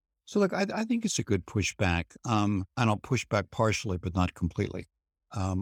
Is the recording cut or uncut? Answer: cut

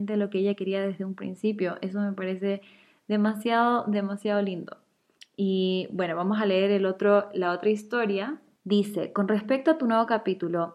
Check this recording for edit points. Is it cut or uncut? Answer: uncut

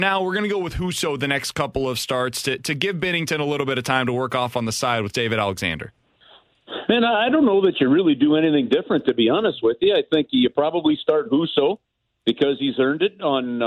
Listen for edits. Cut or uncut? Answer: uncut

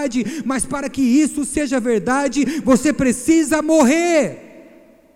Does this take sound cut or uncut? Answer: uncut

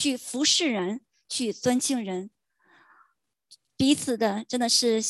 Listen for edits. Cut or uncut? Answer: uncut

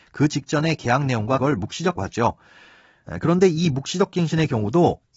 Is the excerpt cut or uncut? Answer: cut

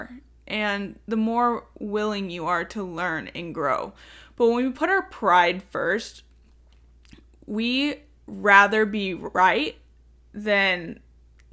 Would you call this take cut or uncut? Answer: uncut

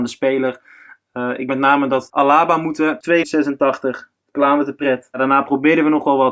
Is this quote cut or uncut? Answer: cut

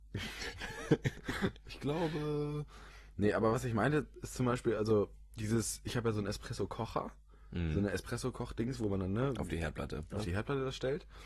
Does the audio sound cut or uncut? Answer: uncut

